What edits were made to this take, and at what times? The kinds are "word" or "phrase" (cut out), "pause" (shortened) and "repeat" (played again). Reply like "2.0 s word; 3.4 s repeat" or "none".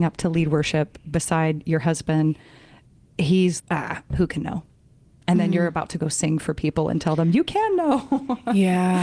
3.6 s word